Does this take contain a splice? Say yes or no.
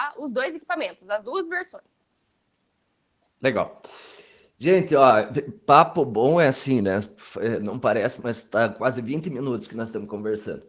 no